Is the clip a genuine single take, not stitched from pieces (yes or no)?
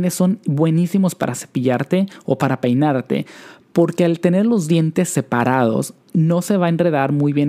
yes